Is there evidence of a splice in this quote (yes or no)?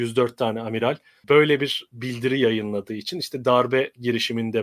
no